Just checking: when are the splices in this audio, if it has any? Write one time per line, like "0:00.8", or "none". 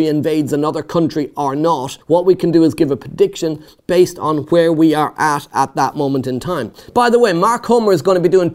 0:02.0